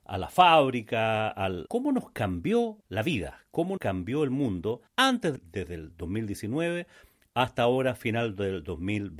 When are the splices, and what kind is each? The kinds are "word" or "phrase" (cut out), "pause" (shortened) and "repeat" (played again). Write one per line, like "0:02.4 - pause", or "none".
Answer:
0:01.7 - phrase
0:02.8 - pause
0:03.8 - word
0:04.9 - pause
0:05.4 - phrase